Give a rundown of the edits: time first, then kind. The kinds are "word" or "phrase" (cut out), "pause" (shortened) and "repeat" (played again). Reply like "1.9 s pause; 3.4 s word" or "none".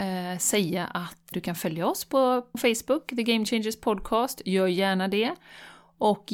1.3 s word; 2.5 s word